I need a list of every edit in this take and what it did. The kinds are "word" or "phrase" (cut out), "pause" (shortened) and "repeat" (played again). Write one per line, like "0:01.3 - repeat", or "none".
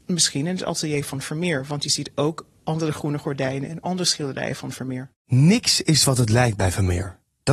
0:05.2 - pause